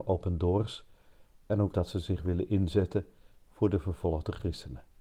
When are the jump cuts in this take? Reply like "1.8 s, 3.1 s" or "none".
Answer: 1.7 s